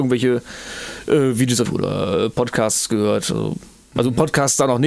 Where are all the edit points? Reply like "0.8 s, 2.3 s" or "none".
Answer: 1.7 s